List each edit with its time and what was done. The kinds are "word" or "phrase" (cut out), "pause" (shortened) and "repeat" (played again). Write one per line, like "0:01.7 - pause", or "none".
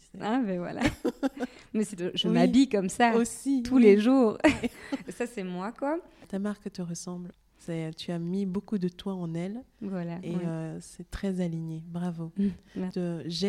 0:02.0 - phrase
0:05.0 - word